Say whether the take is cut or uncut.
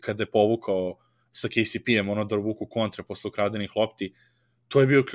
uncut